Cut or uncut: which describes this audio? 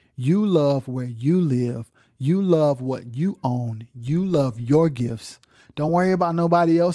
uncut